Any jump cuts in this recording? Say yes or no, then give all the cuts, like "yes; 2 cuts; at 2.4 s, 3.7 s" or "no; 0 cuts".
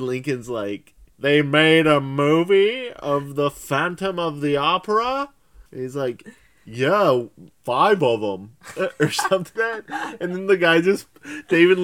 yes; 4 cuts; at 1.1 s, 5.7 s, 7.5 s, 9.6 s